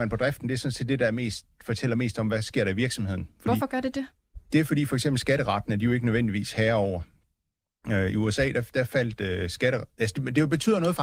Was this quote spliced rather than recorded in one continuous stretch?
no; 0 cuts

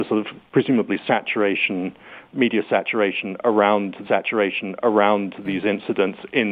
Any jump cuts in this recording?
yes; 1 cut; at 4.0 s

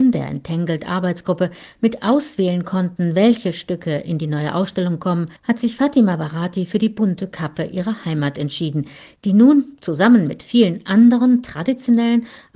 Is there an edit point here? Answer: yes; 1 cut; at 5.4 s

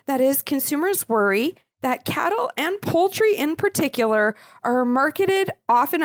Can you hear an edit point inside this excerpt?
no; 0 cuts

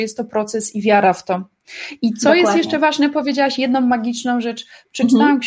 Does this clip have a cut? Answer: no; 0 cuts

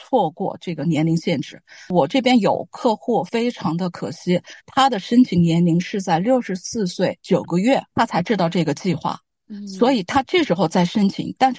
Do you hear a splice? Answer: yes; 2 cuts; at 4.6 s, 7.9 s

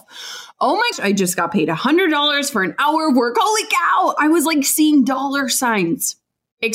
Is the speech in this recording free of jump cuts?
no; 1 cut; at 0.9 s

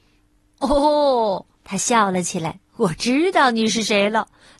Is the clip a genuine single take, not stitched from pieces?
no; 2 cuts; at 1.5 s, 2.7 s

